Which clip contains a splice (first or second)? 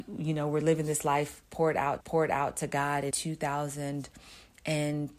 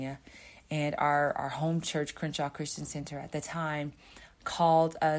first